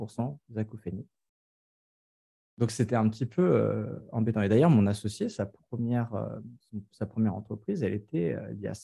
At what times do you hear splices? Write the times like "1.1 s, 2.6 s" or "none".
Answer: none